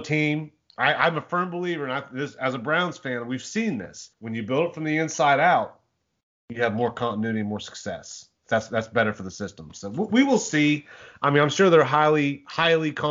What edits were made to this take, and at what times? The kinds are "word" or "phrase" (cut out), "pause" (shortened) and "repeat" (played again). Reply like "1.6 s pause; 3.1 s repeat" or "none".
4.1 s pause; 8.4 s pause